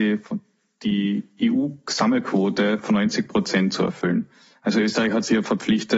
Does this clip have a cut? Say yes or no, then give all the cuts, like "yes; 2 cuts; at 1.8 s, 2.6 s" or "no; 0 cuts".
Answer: no; 0 cuts